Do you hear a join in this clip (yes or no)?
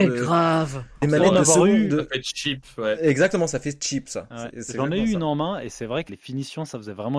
yes